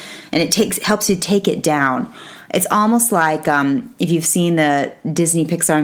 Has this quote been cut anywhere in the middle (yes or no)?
no